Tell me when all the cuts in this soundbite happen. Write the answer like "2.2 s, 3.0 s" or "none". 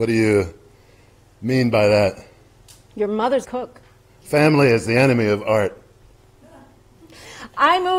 3.4 s